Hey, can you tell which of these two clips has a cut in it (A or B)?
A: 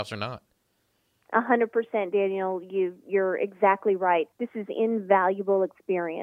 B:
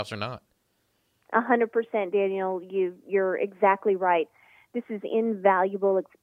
A